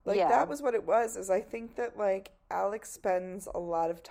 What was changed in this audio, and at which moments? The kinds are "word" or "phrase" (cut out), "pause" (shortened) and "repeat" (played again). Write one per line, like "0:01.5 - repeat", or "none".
none